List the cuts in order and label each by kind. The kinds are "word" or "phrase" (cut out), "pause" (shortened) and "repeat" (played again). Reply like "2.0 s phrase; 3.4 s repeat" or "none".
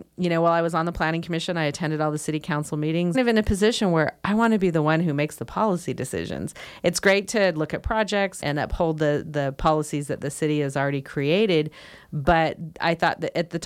3.1 s phrase; 8.4 s word